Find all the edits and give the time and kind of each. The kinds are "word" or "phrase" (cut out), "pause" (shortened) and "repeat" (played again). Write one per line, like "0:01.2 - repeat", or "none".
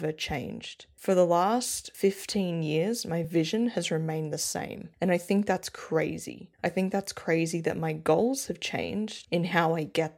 none